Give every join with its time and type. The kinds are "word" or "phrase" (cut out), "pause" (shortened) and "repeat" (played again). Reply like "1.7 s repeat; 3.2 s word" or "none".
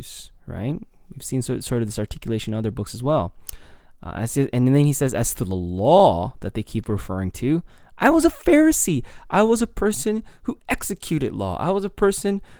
none

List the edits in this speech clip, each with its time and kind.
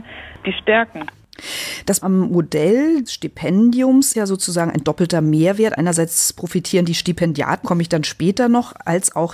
2.0 s word; 3.1 s word; 4.1 s word; 7.6 s word

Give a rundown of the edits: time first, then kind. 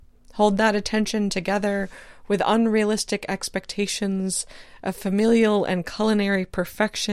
none

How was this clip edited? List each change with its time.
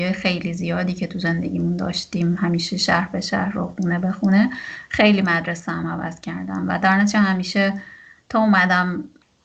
none

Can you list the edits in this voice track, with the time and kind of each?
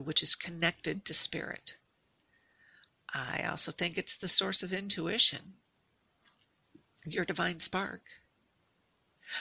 none

